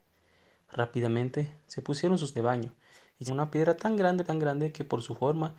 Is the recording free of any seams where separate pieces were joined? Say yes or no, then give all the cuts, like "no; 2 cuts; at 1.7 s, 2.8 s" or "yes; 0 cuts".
no; 3 cuts; at 2.3 s, 3.3 s, 4.3 s